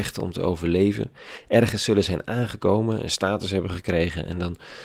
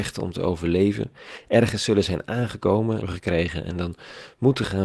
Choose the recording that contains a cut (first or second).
second